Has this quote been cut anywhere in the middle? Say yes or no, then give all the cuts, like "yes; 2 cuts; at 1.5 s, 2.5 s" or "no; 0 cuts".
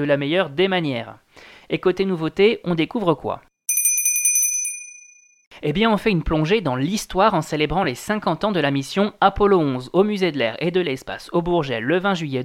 no; 0 cuts